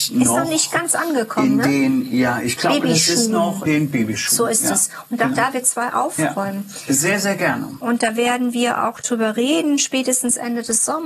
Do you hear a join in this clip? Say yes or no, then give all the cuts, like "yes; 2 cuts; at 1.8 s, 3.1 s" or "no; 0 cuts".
yes; 2 cuts; at 3.7 s, 5.5 s